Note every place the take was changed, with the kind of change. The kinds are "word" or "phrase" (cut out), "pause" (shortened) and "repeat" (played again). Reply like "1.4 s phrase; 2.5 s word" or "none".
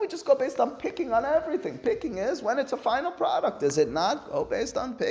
none